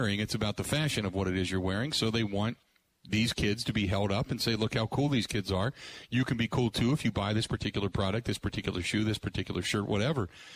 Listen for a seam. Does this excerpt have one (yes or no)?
no